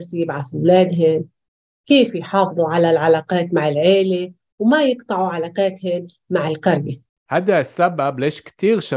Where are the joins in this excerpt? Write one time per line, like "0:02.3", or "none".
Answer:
none